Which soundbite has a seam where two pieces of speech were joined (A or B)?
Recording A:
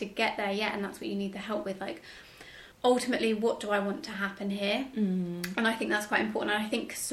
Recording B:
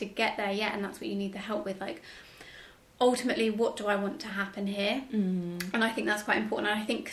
A